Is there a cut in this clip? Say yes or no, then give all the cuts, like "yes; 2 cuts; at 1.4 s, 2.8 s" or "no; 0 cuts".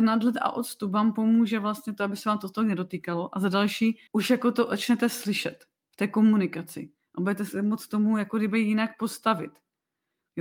yes; 1 cut; at 4.1 s